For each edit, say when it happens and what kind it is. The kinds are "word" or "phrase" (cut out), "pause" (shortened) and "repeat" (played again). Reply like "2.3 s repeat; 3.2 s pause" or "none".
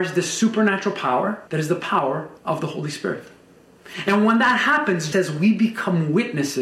1.5 s pause; 2.4 s pause; 5.1 s word